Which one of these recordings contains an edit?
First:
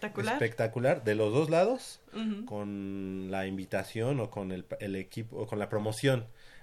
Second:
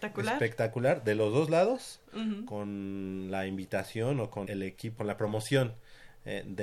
second; 2 cuts; at 4.4 s, 5.0 s

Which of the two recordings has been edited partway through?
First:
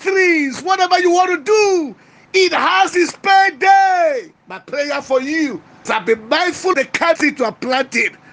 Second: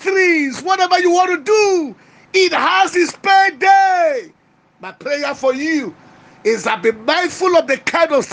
first; 4 cuts; at 4.4 s, 5.9 s, 6.7 s, 7.2 s

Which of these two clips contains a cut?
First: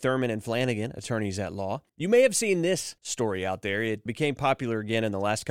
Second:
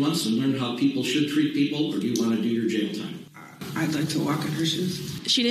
first; 3 cuts; at 1.9 s, 3.0 s, 4.1 s

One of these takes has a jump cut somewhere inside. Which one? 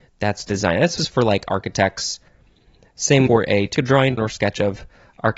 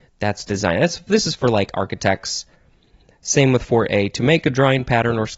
first; 4 cuts; at 1.0 s, 3.3 s, 3.8 s, 4.2 s

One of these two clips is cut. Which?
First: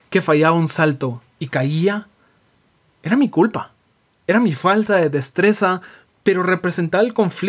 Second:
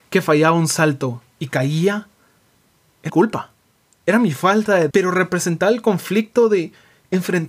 second; 2 cuts; at 3.1 s, 4.9 s

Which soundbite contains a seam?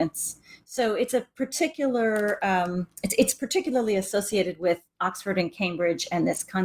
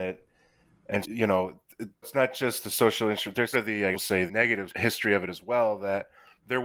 second; 6 cuts; at 1.0 s, 2.0 s, 3.5 s, 3.9 s, 4.3 s, 4.7 s

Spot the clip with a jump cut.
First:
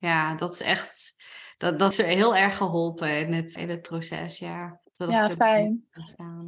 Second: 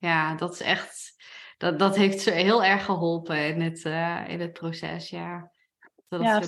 first; 3 cuts; at 1.9 s, 3.6 s, 4.8 s

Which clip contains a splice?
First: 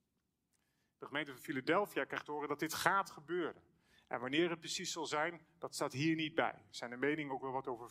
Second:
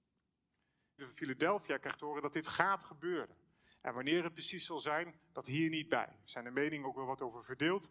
second; 2 cuts; at 1.0 s, 5.4 s

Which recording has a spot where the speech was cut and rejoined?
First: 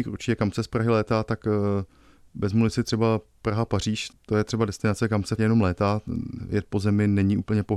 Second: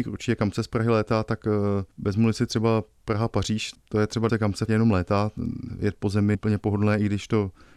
second; 3 cuts; at 1.9 s, 4.3 s, 6.3 s

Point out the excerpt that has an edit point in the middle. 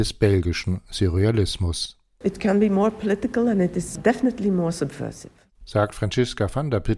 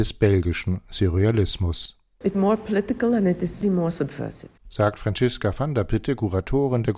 second; 3 cuts; at 2.3 s, 3.6 s, 4.6 s

